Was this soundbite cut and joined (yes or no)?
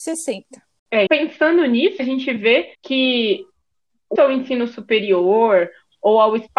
yes